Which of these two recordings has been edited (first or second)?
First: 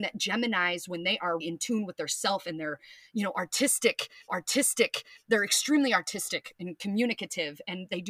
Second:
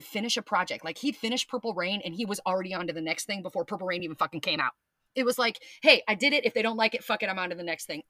first